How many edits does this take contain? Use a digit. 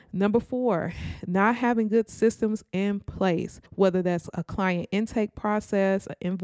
1